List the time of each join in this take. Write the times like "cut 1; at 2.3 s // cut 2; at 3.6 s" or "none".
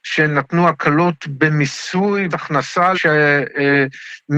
cut 1; at 2.3 s // cut 2; at 2.9 s